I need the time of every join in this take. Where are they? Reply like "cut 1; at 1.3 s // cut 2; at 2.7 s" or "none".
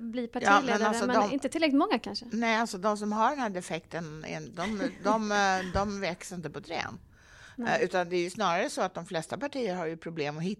none